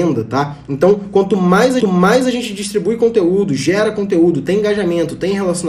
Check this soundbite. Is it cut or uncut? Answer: cut